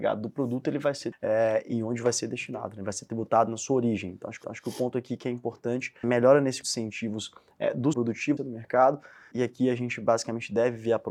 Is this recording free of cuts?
no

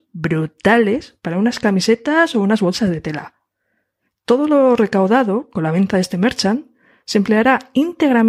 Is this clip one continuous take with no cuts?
yes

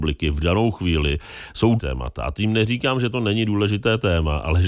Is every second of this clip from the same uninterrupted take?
no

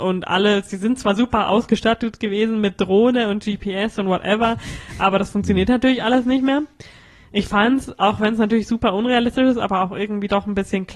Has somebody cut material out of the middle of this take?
no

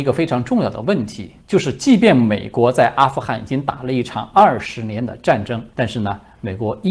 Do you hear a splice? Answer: yes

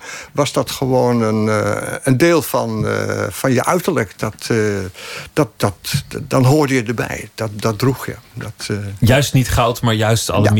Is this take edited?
no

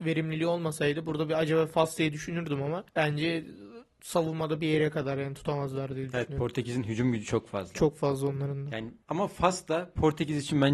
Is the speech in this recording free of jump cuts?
no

